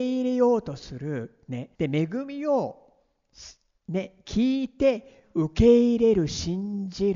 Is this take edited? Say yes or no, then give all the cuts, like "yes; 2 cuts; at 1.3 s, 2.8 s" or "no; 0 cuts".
yes; 1 cut; at 1.7 s